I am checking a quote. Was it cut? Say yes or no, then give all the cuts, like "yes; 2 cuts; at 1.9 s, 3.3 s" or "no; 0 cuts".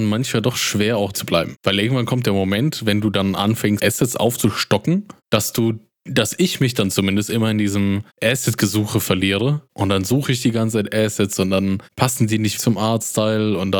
yes; 3 cuts; at 1.1 s, 3.8 s, 12.6 s